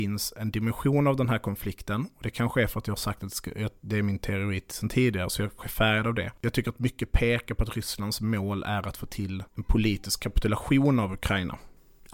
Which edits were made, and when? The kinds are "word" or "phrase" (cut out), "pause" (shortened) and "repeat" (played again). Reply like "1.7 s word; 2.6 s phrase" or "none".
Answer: 5.6 s word; 9.5 s word